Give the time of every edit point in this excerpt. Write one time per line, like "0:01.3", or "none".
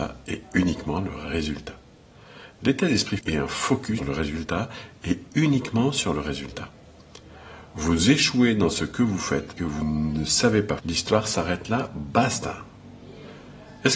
0:03.2
0:04.0
0:09.6
0:10.8